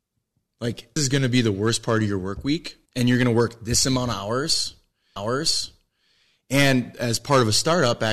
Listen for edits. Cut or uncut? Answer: cut